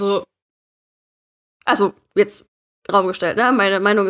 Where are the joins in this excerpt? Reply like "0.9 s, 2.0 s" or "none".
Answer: 2.9 s